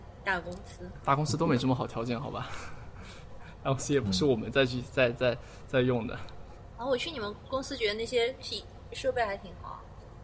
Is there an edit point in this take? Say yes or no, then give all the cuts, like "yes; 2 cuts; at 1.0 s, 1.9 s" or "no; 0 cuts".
no; 0 cuts